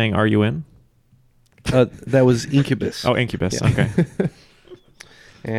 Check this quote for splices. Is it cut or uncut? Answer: uncut